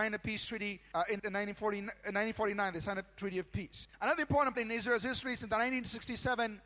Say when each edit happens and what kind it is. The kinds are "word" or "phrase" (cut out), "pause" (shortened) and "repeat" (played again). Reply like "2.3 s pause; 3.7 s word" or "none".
1.2 s word; 4.5 s word